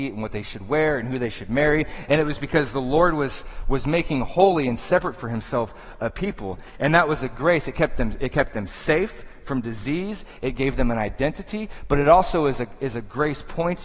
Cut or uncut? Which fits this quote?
uncut